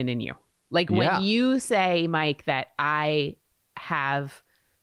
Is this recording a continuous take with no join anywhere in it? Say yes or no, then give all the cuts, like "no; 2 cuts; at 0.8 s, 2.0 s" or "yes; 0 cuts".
yes; 0 cuts